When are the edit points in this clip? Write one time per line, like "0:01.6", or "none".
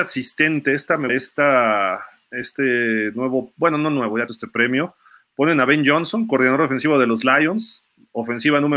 0:01.1
0:04.3